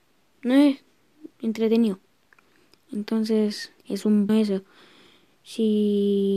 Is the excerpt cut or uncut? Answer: cut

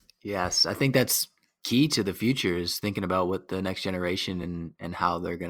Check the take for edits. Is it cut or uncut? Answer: uncut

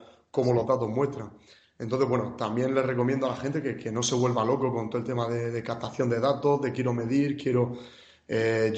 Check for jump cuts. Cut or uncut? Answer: uncut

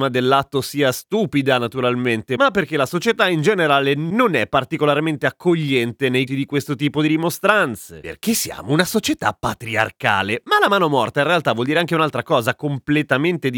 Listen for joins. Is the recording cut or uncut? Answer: cut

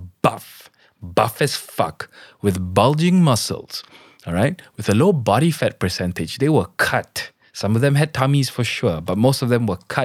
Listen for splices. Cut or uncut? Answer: uncut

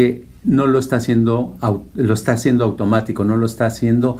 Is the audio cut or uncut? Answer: uncut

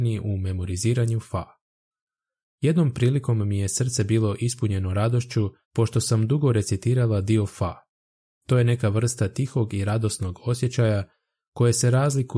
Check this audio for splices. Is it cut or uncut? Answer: cut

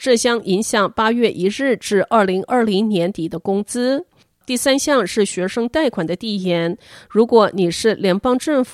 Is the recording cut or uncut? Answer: uncut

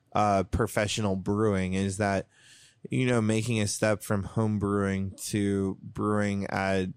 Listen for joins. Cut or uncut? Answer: uncut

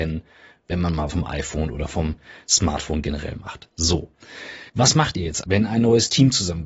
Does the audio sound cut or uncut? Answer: cut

